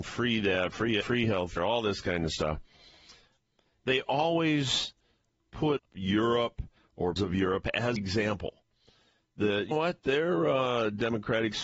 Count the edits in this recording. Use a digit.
6